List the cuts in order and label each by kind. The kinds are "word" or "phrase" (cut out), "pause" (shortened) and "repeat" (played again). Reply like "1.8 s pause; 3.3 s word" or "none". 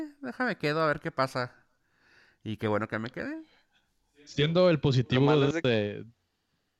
none